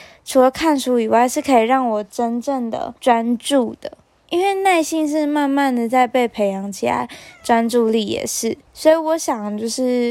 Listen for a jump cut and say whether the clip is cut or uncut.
cut